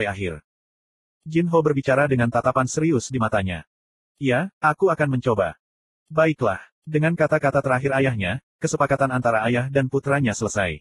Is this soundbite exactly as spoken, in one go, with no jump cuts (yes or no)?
no